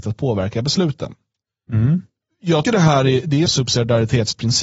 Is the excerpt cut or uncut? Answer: cut